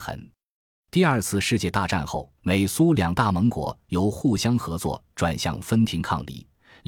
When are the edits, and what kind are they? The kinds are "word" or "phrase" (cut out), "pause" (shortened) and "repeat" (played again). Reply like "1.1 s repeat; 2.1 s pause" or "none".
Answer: 2.4 s pause